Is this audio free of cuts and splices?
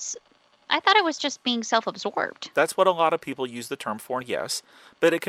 no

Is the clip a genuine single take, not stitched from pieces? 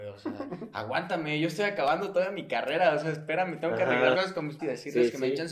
no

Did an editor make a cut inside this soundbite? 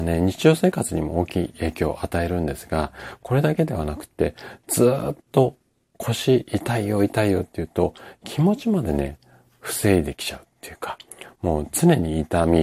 no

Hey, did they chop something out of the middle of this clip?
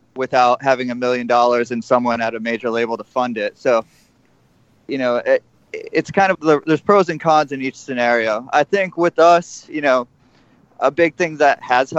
yes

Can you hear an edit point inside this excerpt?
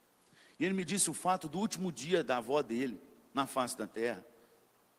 no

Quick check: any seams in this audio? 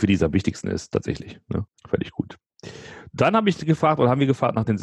yes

